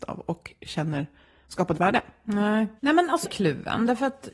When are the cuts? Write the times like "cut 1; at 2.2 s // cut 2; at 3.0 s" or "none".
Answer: cut 1; at 1.7 s // cut 2; at 2.8 s // cut 3; at 3.2 s